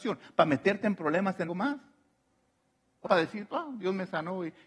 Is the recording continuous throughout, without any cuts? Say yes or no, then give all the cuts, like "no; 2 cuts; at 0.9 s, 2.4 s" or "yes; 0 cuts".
no; 2 cuts; at 1.5 s, 3.0 s